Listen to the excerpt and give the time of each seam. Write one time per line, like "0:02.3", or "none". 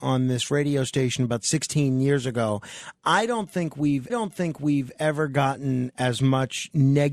0:04.1